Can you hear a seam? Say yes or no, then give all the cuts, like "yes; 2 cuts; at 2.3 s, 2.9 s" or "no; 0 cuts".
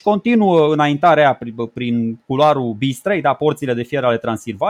no; 0 cuts